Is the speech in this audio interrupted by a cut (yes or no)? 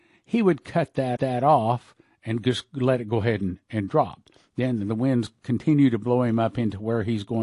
yes